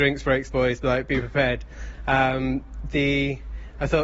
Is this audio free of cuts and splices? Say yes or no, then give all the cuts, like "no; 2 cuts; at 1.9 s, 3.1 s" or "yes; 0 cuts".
yes; 0 cuts